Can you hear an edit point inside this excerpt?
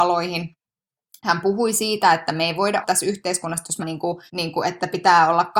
yes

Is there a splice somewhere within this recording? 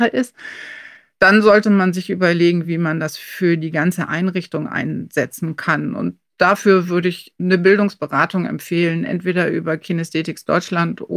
no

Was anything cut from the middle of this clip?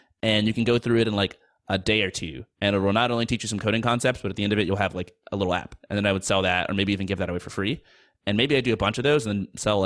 no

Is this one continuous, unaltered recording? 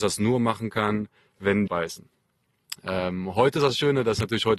no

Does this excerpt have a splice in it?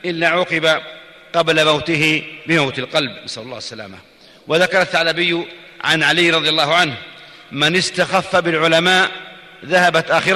no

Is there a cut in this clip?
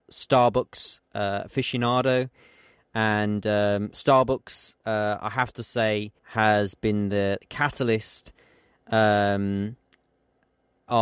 yes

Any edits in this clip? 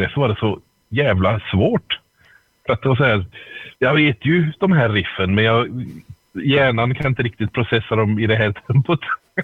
yes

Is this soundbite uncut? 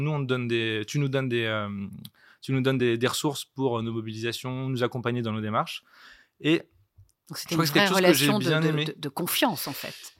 yes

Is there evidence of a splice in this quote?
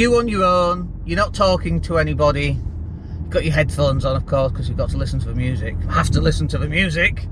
no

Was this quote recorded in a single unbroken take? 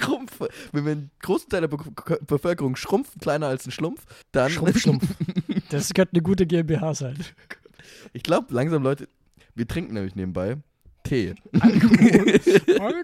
no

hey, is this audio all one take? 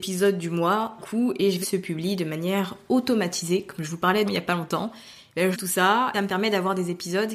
no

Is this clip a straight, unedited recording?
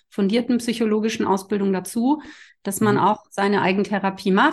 yes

